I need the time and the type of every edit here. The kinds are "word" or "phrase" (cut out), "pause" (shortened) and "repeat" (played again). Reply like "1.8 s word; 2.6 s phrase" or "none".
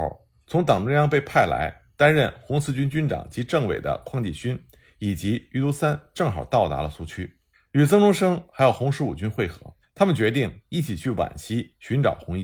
7.5 s pause; 9.8 s pause